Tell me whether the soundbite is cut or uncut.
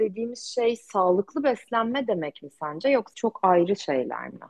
cut